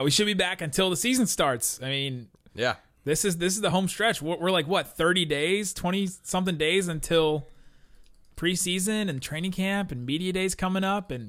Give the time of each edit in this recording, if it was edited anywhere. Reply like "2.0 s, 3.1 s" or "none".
none

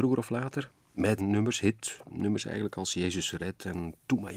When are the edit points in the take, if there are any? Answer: 1.2 s

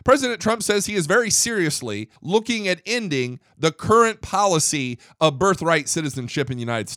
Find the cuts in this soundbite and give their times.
2.2 s

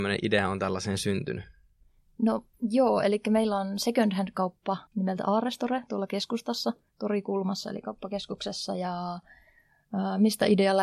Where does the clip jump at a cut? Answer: 2.5 s, 4.9 s, 6.9 s

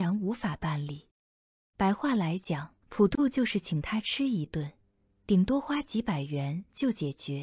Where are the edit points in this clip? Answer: 2.8 s

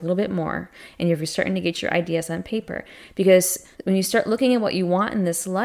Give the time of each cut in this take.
3.7 s

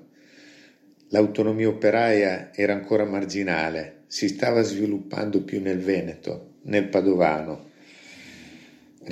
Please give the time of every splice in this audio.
none

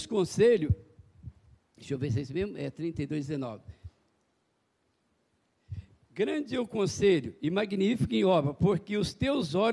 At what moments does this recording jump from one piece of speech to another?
none

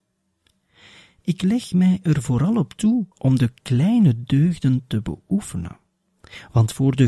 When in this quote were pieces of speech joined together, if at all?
3.1 s

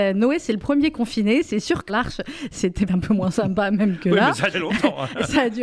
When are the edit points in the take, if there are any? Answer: 1.9 s, 2.9 s, 4.5 s

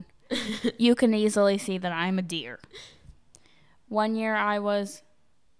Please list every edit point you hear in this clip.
none

